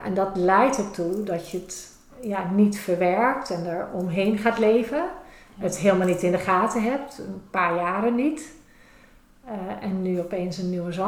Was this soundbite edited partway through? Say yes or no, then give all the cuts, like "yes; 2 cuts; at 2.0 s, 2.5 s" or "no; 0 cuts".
no; 0 cuts